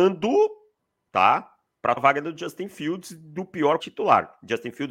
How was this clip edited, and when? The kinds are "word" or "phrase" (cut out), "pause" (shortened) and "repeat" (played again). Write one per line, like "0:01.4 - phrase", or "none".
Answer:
0:02.0 - word
0:03.8 - word